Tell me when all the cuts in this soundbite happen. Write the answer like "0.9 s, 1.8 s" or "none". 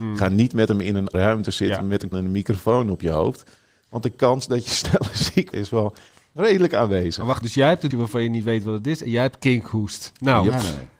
1.1 s, 2.1 s, 5.5 s, 7.4 s, 7.9 s